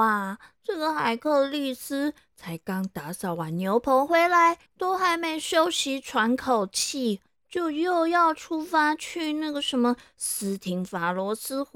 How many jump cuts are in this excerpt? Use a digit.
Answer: 2